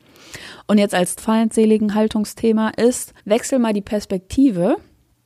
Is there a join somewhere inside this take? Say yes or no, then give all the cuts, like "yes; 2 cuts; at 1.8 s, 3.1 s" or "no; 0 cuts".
yes; 2 cuts; at 1.2 s, 3.2 s